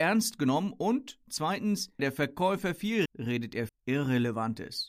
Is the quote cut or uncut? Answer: cut